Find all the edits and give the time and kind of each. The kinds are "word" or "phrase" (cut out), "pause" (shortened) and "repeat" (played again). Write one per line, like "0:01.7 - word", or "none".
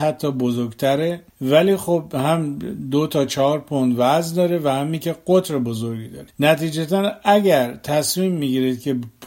0:01.3 - pause
0:06.3 - pause